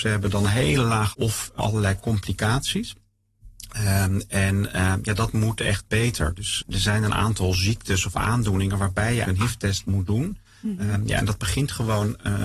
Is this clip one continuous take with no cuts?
no; 4 cuts; at 1.1 s, 1.6 s, 6.6 s, 9.2 s

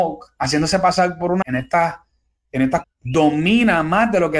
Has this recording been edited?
yes; 2 cuts; at 1.4 s, 2.8 s

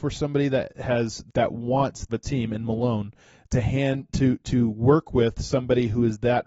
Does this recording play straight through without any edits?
no; 2 cuts; at 1.3 s, 2.1 s

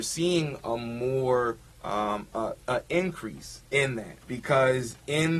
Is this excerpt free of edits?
no; 4 cuts; at 1.7 s, 2.6 s, 3.7 s, 4.2 s

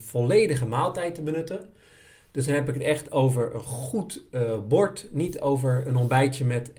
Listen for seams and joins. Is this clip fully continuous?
yes; 0 cuts

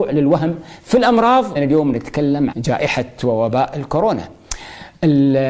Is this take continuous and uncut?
no; 2 cuts; at 1.6 s, 2.5 s

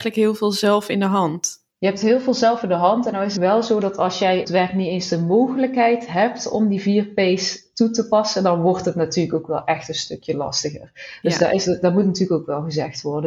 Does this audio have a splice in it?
yes; 3 cuts; at 1.7 s, 3.4 s, 4.4 s

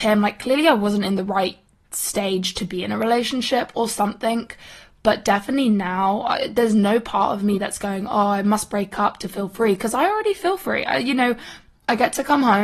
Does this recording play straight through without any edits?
yes; 0 cuts

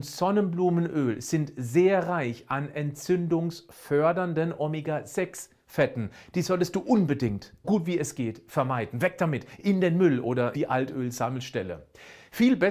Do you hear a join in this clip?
yes; 2 cuts; at 7.6 s, 10.5 s

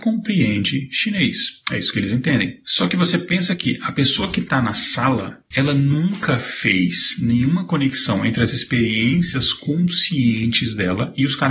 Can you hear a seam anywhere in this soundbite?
no; 0 cuts

